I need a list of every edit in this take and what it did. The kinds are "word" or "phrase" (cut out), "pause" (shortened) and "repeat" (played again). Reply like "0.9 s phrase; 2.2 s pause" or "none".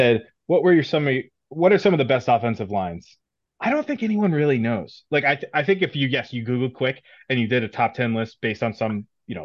none